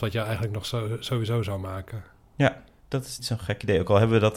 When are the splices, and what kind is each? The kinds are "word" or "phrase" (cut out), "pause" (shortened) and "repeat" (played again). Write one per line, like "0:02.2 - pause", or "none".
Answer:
0:03.2 - word